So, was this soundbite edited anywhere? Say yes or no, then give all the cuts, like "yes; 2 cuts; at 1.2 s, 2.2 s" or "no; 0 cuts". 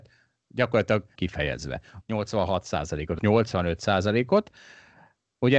yes; 3 cuts; at 1.2 s, 2.0 s, 3.2 s